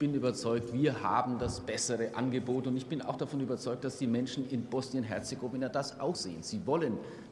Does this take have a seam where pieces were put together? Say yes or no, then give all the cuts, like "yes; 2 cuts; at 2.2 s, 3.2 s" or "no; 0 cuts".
yes; 1 cut; at 6.1 s